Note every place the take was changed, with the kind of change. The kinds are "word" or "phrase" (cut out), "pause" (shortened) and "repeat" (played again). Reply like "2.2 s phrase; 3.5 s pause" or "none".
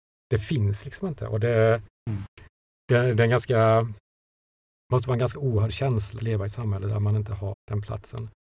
6.2 s word; 7.5 s word